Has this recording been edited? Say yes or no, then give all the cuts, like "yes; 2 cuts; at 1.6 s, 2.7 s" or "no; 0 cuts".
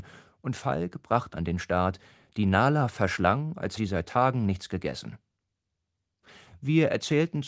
yes; 2 cuts; at 1.3 s, 3.8 s